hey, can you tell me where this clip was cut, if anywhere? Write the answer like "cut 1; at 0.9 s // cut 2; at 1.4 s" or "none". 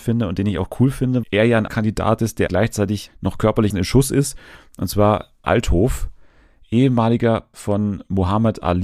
cut 1; at 1.2 s // cut 2; at 1.7 s // cut 3; at 2.5 s // cut 4; at 3.1 s // cut 5; at 3.7 s // cut 6; at 5.4 s // cut 7; at 7.5 s